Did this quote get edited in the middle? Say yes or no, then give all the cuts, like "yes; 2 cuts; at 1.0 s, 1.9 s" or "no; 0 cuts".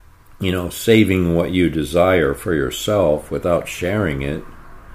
no; 0 cuts